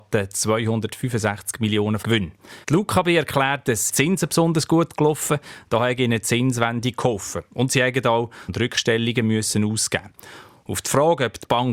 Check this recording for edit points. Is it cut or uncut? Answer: cut